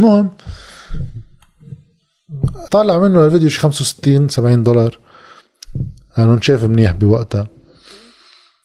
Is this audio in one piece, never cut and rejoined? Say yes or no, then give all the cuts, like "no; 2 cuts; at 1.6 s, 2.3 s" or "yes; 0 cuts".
no; 1 cut; at 2.7 s